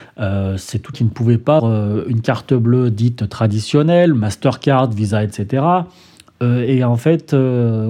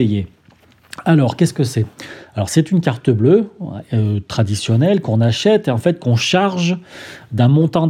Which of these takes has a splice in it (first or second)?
first